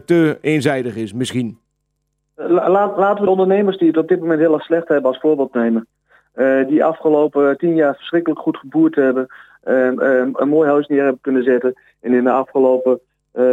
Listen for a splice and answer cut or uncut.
cut